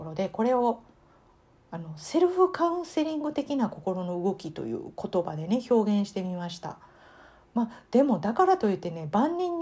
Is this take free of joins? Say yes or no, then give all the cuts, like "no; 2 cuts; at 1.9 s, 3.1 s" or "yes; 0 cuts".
yes; 0 cuts